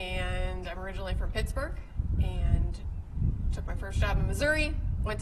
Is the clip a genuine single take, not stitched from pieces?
yes; 0 cuts

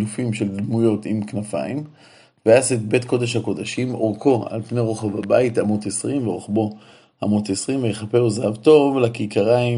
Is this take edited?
no; 0 cuts

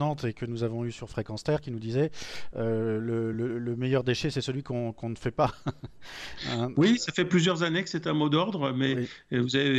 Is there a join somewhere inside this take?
no; 0 cuts

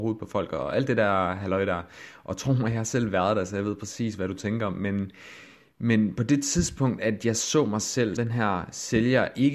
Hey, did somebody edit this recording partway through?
yes; 1 cut; at 8.2 s

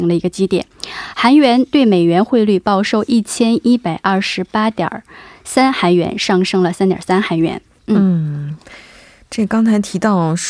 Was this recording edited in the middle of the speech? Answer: no; 0 cuts

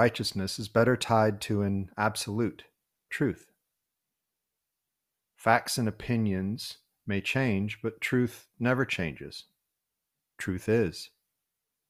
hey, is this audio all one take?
no; 1 cut; at 3.1 s

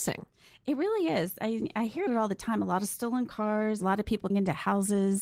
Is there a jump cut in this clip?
yes; 2 cuts; at 2.1 s, 4.3 s

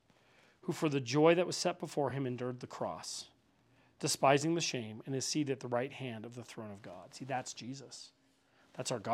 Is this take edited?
no; 0 cuts

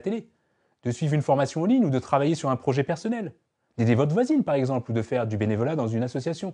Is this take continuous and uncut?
yes; 0 cuts

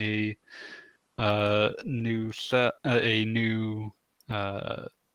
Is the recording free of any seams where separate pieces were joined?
yes; 0 cuts

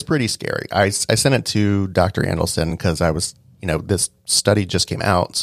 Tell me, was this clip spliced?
no; 0 cuts

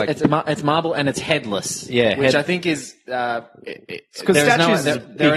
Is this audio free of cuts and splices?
yes; 0 cuts

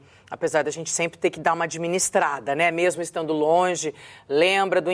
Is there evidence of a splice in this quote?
no; 0 cuts

